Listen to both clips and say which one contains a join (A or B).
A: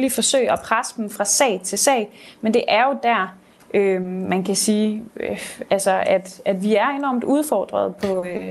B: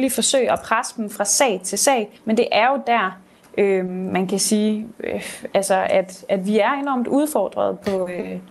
B